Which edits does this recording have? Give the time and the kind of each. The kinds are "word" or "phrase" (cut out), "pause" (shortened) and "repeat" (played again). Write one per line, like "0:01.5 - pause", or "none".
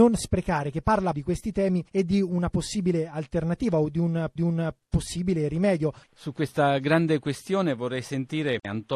0:01.1 - word
0:01.9 - pause
0:04.4 - repeat